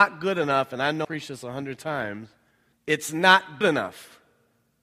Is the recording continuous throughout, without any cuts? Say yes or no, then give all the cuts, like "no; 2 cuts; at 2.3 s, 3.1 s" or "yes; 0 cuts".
no; 3 cuts; at 1.0 s, 2.5 s, 3.6 s